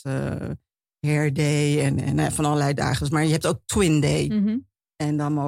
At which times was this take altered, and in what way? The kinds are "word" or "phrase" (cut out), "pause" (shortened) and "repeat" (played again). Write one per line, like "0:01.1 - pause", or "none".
none